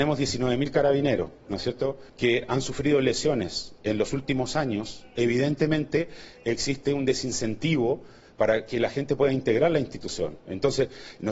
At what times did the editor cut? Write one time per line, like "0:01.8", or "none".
0:02.1